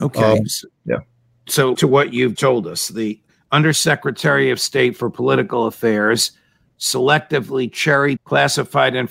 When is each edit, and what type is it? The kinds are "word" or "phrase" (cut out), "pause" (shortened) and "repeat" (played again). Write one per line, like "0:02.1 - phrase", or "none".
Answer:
0:01.7 - word
0:02.4 - word
0:08.2 - word